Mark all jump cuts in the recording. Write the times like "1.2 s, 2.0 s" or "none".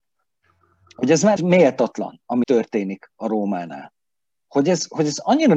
1.4 s, 2.4 s